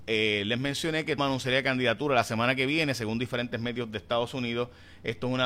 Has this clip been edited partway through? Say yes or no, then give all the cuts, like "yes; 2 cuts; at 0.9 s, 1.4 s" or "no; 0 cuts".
yes; 1 cut; at 1.2 s